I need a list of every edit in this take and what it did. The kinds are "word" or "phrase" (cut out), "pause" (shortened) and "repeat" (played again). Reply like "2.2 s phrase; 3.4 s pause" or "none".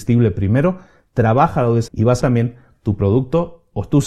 1.9 s word; 2.2 s phrase